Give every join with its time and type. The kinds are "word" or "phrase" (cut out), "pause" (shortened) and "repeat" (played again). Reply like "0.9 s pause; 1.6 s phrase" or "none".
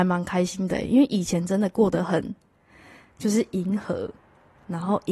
none